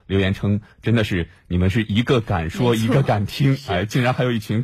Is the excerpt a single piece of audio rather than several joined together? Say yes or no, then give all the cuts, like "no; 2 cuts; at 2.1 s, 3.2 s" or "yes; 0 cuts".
yes; 0 cuts